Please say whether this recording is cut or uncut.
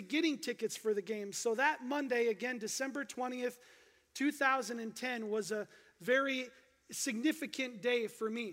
uncut